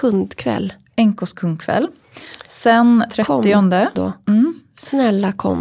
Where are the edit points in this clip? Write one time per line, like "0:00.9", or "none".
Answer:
0:03.1
0:04.0